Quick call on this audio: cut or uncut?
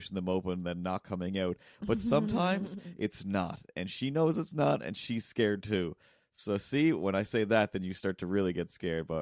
uncut